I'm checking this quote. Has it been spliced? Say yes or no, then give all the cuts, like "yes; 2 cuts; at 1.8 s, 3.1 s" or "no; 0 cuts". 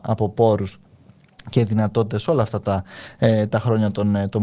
no; 0 cuts